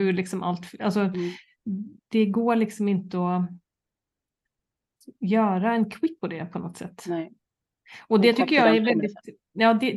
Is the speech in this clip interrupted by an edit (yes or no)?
yes